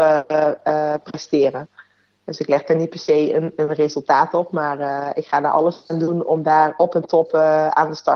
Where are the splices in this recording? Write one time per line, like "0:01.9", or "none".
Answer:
none